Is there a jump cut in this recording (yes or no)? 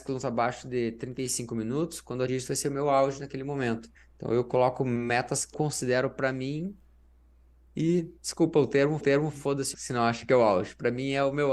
yes